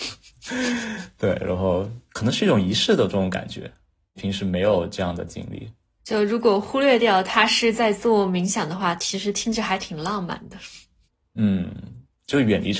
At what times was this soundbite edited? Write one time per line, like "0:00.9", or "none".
none